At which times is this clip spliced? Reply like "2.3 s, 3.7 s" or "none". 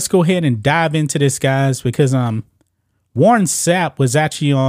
none